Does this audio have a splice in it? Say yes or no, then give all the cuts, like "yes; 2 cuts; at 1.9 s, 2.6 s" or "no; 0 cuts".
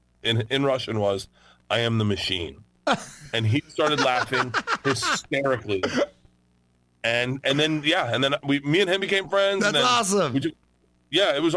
no; 0 cuts